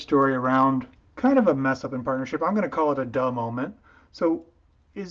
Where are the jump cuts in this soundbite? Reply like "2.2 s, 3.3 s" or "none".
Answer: 1.0 s